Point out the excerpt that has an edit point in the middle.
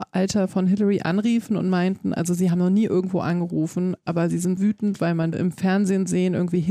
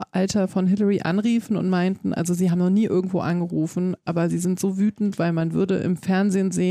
first; 2 cuts; at 4.6 s, 5.3 s

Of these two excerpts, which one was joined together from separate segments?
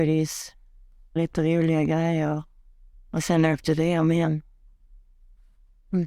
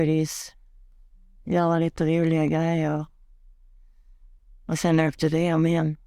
first; 2 cuts; at 1.2 s, 2.9 s

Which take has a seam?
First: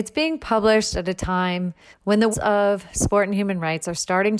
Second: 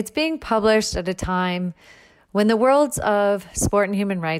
first; 2 cuts; at 1.9 s, 2.3 s

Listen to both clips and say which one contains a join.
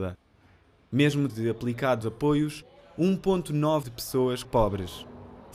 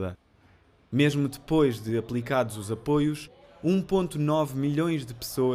first; 4 cuts; at 1.3 s, 2.0 s, 3.8 s, 4.4 s

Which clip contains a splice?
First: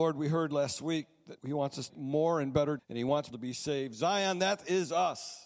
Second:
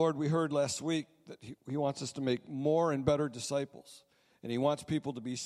first; 4 cuts; at 1.4 s, 1.9 s, 2.8 s, 3.3 s

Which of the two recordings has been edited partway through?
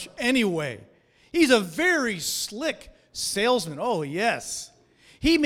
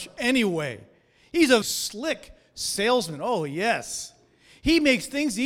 second; 1 cut; at 1.6 s

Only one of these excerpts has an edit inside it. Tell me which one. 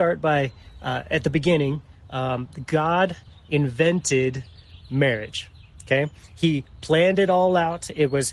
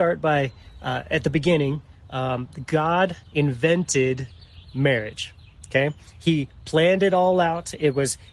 second; 1 cut; at 3.3 s

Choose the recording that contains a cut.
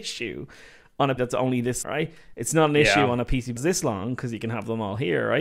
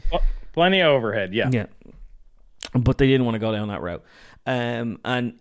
first; 3 cuts; at 1.2 s, 1.8 s, 3.6 s

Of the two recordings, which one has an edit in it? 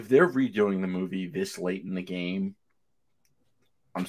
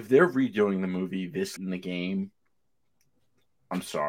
second; 1 cut; at 1.6 s

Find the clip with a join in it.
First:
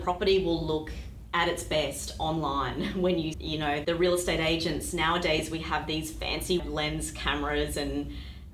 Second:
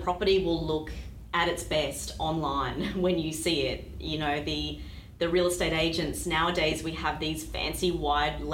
first; 3 cuts; at 3.3 s, 3.8 s, 6.6 s

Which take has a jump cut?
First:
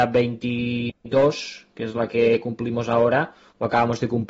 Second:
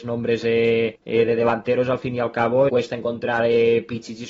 second; 2 cuts; at 1.0 s, 2.7 s

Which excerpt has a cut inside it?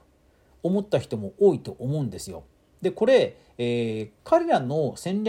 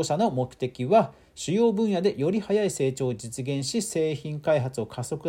first; 1 cut; at 4.2 s

